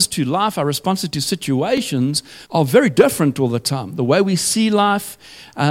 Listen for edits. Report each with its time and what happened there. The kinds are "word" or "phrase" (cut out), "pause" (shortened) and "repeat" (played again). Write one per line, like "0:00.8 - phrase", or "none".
0:02.4 - pause